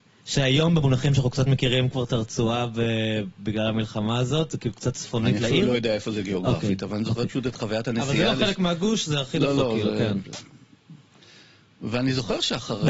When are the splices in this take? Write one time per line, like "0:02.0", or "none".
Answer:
none